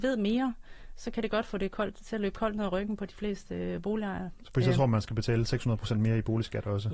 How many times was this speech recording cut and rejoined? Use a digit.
0